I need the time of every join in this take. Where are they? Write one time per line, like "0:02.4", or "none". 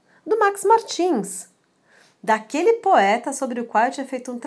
none